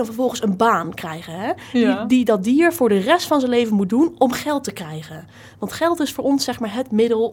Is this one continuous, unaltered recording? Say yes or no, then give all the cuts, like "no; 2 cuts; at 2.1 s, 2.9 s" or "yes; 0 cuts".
yes; 0 cuts